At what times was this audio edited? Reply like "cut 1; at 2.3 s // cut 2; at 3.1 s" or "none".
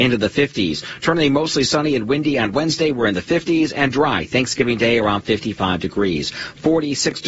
none